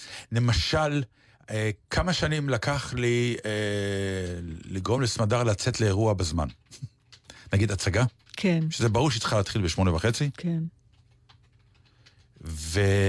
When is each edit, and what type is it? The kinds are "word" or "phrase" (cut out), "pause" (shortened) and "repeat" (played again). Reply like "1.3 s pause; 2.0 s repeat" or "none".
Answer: none